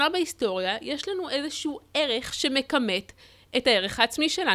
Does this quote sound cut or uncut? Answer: uncut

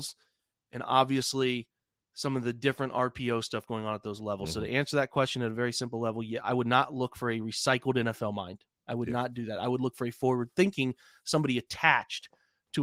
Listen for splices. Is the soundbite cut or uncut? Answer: uncut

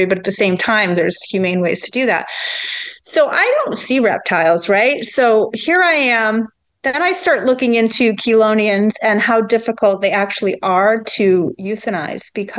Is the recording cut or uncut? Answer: uncut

